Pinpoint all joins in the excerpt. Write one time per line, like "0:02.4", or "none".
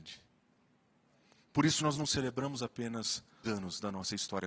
0:01.8
0:03.5